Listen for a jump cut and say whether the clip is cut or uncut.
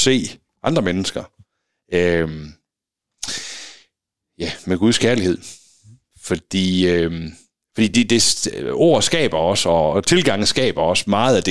uncut